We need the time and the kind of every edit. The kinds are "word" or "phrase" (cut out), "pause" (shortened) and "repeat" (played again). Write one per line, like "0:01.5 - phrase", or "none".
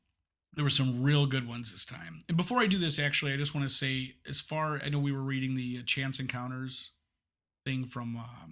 none